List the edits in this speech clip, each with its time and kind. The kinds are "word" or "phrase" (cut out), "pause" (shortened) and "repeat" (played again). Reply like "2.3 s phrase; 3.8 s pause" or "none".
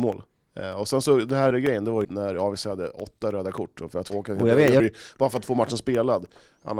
1.5 s word; 2.0 s word; 4.1 s word; 4.8 s word